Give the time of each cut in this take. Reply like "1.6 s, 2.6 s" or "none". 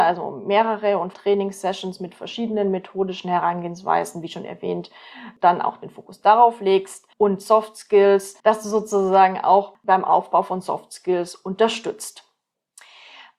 1.1 s, 7.1 s, 8.4 s